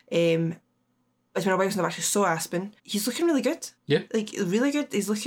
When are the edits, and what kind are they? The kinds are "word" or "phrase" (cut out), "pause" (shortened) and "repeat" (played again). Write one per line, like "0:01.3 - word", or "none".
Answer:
0:02.8 - pause
0:03.8 - pause

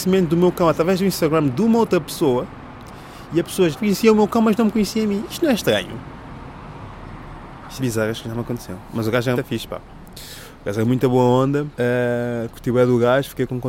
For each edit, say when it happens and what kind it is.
0:03.7 - word
0:07.8 - phrase
0:09.3 - word
0:11.7 - pause

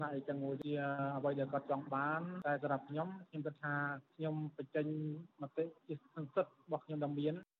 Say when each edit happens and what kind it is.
0:05.3 - pause
0:05.8 - pause

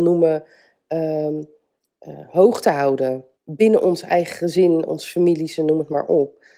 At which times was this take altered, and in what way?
0:03.3 - pause

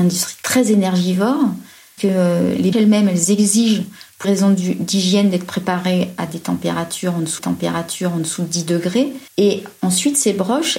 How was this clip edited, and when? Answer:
0:02.0 - word
0:02.7 - word
0:04.2 - word
0:07.4 - repeat
0:09.3 - pause

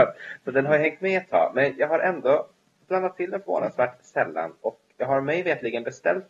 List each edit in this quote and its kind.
0:04.9 - pause

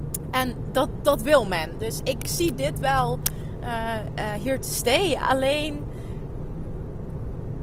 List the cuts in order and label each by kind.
none

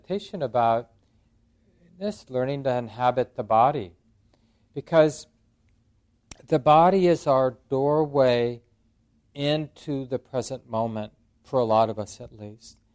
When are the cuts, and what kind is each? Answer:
none

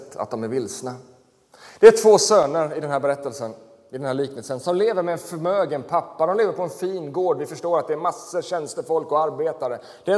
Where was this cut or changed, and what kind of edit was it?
none

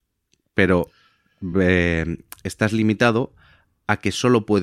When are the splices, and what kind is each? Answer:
none

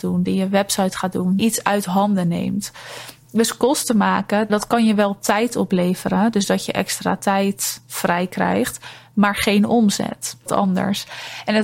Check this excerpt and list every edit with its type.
0:01.4 - word
0:04.5 - word
0:10.5 - phrase

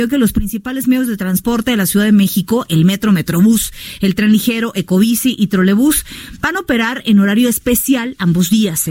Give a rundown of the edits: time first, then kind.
none

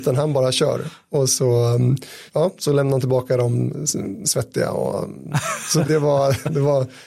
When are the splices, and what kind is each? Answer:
0:02.3 - pause
0:04.2 - word
0:05.8 - word

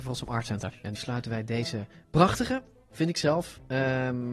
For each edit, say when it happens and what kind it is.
0:00.9 - word

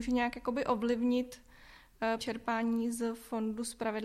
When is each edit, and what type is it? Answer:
0:02.2 - word

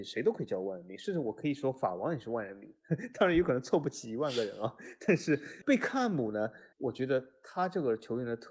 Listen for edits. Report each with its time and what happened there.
0:06.7 - pause

